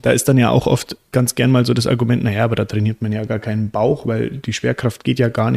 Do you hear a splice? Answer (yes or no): no